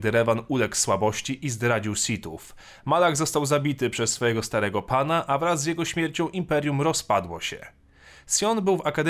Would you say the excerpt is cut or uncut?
uncut